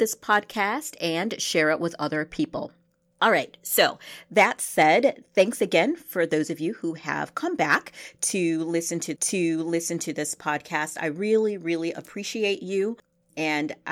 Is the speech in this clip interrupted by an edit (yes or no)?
yes